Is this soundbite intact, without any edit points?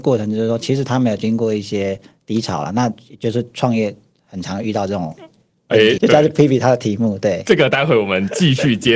no; 1 cut; at 6.0 s

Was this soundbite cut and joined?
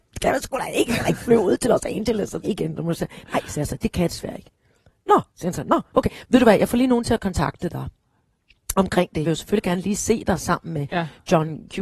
yes; 4 cuts; at 2.4 s, 5.3 s, 5.9 s, 9.2 s

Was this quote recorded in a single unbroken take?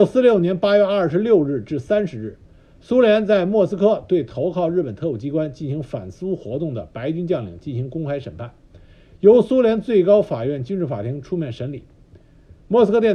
yes; 0 cuts

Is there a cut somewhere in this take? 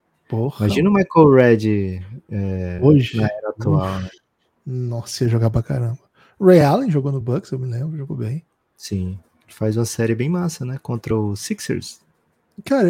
no; 0 cuts

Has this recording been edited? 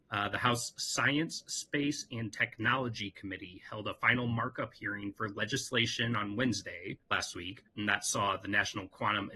yes; 2 cuts; at 7.0 s, 7.7 s

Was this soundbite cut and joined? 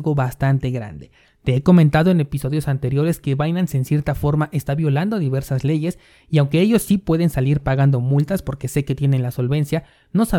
no; 0 cuts

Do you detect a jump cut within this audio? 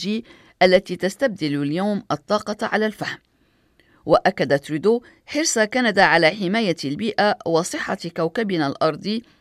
no; 0 cuts

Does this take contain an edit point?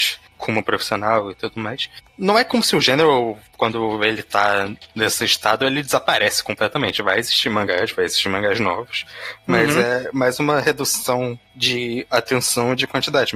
no; 0 cuts

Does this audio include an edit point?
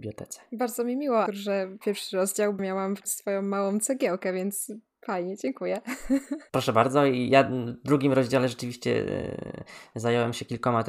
yes; 4 cuts; at 1.3 s, 1.8 s, 2.6 s, 3.0 s

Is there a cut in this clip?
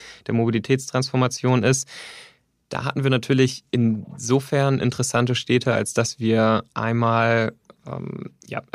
no; 0 cuts

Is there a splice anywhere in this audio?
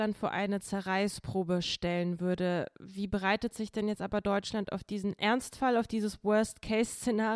no; 0 cuts

